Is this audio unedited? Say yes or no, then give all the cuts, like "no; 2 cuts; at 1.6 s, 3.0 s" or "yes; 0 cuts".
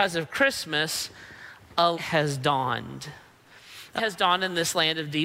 no; 2 cuts; at 1.9 s, 4.0 s